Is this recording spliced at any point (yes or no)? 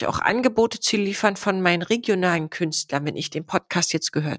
no